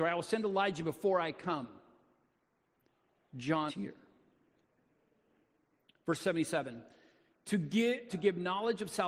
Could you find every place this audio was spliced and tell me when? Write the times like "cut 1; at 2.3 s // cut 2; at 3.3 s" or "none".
cut 1; at 3.7 s // cut 2; at 8.1 s